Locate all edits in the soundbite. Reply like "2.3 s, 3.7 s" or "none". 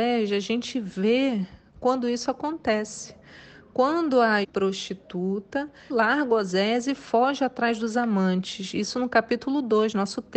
4.4 s, 5.9 s